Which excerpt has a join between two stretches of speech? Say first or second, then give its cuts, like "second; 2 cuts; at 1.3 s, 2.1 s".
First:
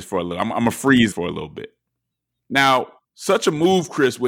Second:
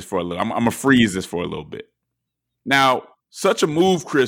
first; 1 cut; at 1.1 s